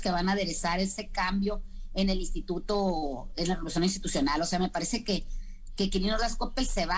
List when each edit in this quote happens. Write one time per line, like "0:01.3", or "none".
none